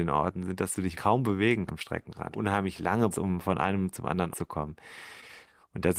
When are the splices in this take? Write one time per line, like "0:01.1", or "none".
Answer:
0:00.9
0:01.7
0:02.3
0:03.1
0:04.3